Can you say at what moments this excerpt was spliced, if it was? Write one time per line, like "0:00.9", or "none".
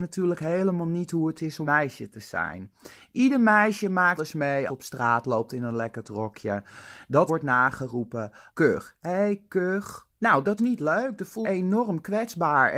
0:01.7
0:04.2
0:04.7
0:06.0
0:07.3
0:08.5
0:10.6
0:11.4